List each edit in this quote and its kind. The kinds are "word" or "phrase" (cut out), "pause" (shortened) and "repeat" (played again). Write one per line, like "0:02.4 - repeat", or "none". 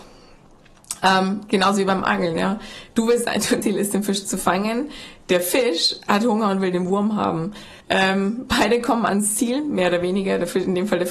0:03.6 - word
0:07.8 - pause

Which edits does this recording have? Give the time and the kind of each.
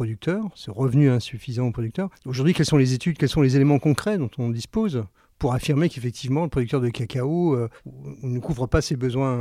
none

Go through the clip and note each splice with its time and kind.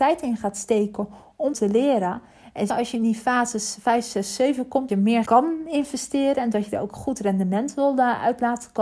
0:01.5 - word
0:02.7 - word
0:04.9 - word
0:05.2 - word

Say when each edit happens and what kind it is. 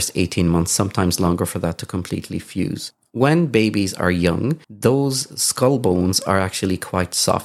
0:04.6 - pause

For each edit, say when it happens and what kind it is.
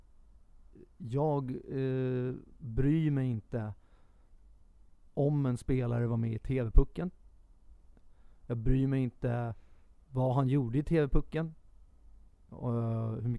none

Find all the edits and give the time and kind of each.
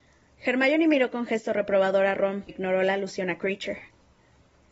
0:02.5 - word

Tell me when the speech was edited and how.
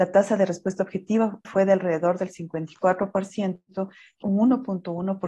0:01.4 - word
0:04.2 - word

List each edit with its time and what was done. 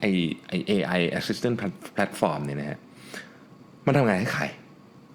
none

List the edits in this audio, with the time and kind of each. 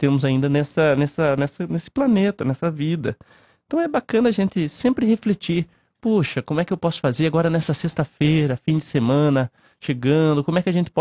none

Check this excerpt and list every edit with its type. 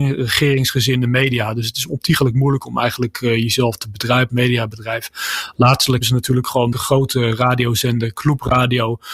0:04.3 - word
0:06.0 - word
0:06.7 - phrase

